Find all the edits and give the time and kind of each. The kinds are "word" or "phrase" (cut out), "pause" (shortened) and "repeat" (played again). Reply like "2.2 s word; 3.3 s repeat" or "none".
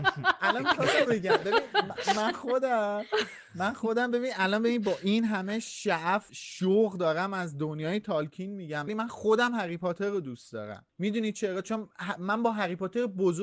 1.1 s word; 6.3 s word; 8.9 s word